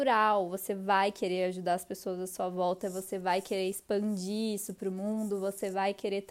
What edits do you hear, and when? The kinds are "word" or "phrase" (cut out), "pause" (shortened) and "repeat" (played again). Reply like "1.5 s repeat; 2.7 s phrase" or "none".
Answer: none